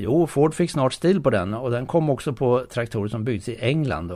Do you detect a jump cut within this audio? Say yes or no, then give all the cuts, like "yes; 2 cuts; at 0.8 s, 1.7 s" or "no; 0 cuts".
no; 0 cuts